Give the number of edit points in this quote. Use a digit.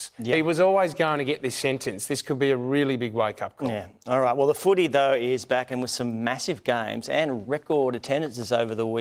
0